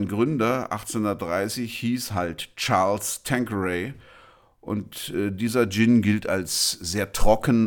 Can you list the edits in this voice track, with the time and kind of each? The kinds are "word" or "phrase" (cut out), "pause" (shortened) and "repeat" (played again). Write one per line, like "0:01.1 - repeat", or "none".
none